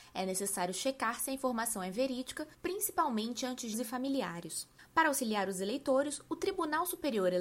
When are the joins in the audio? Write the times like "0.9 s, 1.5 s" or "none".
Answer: 2.5 s, 3.7 s, 4.8 s